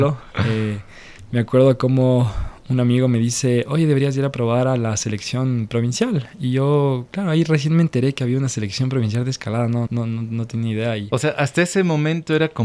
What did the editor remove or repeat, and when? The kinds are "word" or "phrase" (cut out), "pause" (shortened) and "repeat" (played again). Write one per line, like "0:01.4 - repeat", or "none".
0:09.9 - word